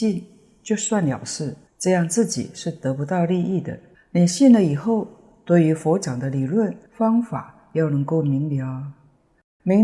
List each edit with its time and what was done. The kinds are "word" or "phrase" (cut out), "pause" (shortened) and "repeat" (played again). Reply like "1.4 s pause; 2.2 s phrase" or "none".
1.7 s pause; 3.9 s pause; 6.9 s pause